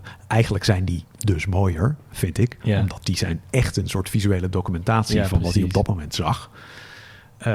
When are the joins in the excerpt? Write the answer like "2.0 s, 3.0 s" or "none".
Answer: 1.1 s, 2.6 s